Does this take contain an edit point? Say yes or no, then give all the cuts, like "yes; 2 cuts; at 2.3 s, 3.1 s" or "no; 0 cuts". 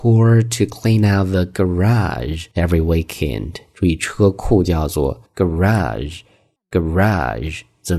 yes; 2 cuts; at 2.5 s, 5.2 s